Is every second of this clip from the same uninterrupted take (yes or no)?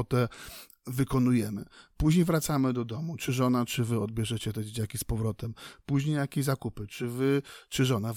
yes